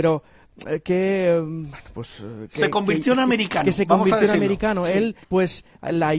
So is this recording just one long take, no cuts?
no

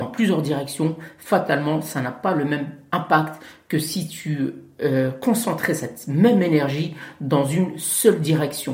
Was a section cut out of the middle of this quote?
no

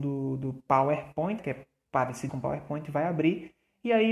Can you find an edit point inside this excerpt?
yes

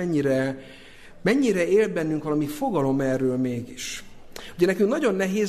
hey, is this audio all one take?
yes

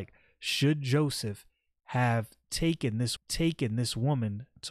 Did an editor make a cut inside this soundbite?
yes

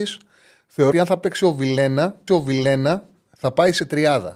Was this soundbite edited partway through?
yes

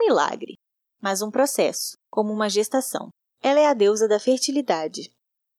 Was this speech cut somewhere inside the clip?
yes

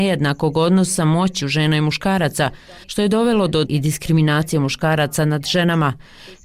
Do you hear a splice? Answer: yes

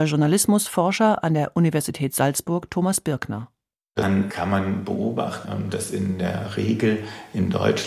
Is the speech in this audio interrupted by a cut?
no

